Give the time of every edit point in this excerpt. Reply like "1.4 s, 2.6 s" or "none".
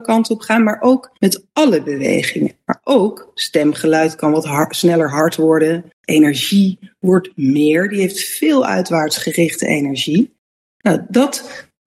1.2 s